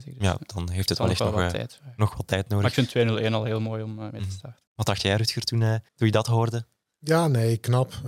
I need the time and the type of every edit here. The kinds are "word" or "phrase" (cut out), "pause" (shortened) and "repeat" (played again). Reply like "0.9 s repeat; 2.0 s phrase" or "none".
4.7 s pause; 5.9 s pause